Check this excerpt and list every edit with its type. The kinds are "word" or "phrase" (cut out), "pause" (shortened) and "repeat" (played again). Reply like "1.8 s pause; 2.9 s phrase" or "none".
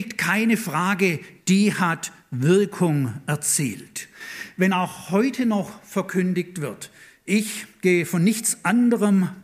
none